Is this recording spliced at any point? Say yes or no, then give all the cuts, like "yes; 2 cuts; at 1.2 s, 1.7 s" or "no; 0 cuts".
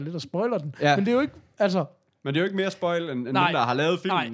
no; 0 cuts